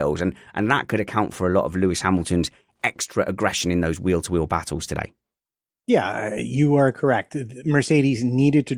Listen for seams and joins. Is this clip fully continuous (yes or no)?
yes